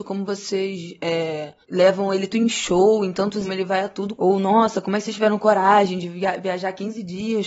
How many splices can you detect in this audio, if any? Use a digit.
4